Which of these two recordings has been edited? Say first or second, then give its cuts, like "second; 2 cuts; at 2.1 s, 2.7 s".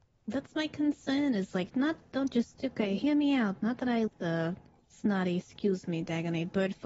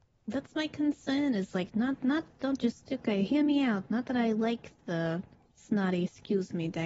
first; 2 cuts; at 1.7 s, 4.1 s